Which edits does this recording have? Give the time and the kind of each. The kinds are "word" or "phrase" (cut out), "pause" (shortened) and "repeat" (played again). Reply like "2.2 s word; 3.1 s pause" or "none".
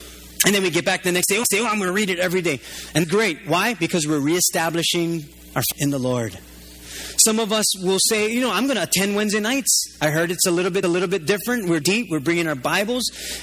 1.4 s repeat; 3.0 s word; 5.7 s word; 10.8 s repeat; 11.8 s word